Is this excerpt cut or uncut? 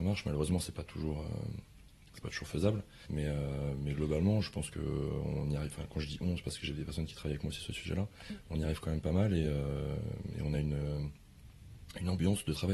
uncut